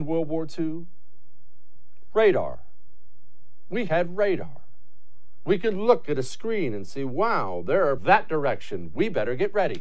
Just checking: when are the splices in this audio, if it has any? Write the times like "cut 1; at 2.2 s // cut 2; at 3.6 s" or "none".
cut 1; at 8.0 s

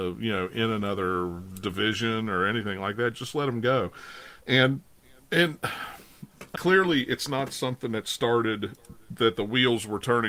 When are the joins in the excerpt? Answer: cut 1; at 6.6 s

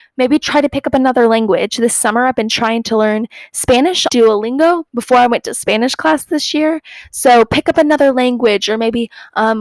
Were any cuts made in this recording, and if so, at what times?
cut 1; at 4.1 s // cut 2; at 4.9 s

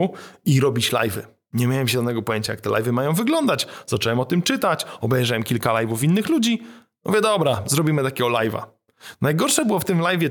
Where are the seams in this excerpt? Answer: none

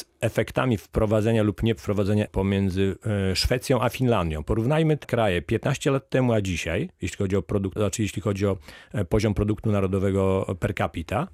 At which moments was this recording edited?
cut 1; at 2.3 s // cut 2; at 5.0 s // cut 3; at 7.8 s

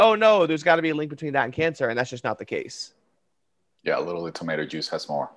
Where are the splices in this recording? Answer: none

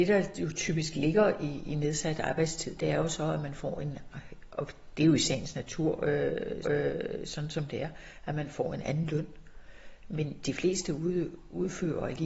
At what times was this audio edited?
cut 1; at 6.6 s

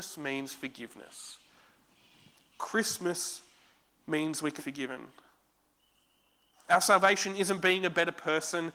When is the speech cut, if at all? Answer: cut 1; at 4.6 s

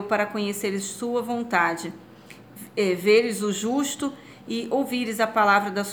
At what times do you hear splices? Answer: none

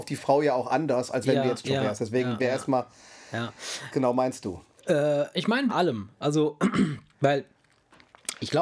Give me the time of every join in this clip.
cut 1; at 1.6 s // cut 2; at 2.4 s // cut 3; at 3.9 s // cut 4; at 5.3 s // cut 5; at 5.7 s

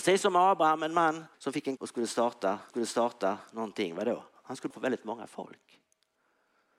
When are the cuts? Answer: cut 1; at 1.3 s // cut 2; at 1.8 s // cut 3; at 2.7 s // cut 4; at 4.7 s

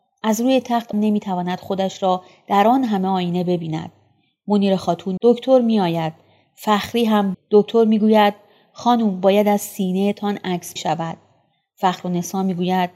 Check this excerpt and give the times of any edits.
cut 1; at 0.9 s // cut 2; at 5.2 s // cut 3; at 7.3 s // cut 4; at 10.8 s

